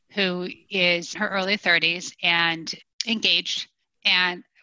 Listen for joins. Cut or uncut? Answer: cut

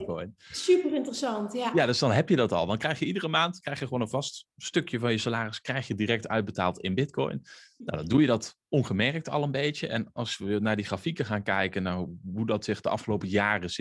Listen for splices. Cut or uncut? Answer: uncut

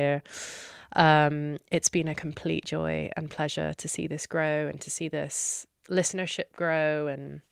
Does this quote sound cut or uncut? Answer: uncut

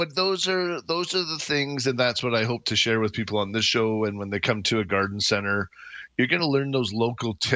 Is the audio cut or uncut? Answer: uncut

